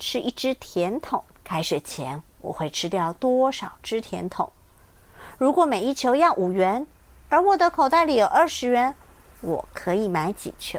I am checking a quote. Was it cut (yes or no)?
yes